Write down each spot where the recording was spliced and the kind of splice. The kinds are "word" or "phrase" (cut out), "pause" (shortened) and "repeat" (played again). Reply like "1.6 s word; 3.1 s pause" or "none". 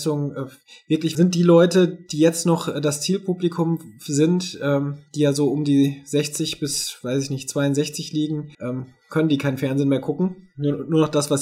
1.1 s phrase; 8.5 s pause